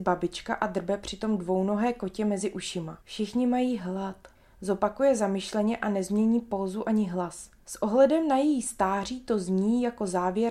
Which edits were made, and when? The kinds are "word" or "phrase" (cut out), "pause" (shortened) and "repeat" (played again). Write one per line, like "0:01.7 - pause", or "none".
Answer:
0:03.0 - pause
0:04.4 - pause
0:07.6 - pause